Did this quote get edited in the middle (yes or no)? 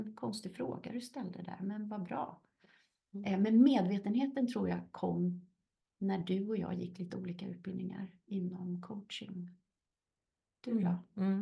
no